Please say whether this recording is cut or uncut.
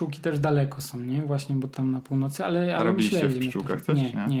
cut